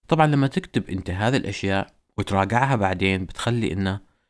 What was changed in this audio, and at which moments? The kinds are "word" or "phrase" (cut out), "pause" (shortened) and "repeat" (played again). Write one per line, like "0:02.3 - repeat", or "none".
none